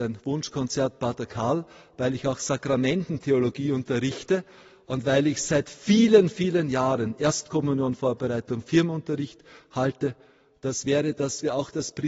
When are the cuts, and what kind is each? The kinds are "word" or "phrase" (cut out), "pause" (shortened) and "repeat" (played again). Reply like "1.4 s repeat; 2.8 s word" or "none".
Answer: none